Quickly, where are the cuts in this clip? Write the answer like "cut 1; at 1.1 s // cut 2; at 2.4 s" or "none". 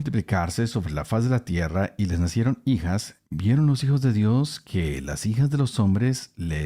cut 1; at 3.3 s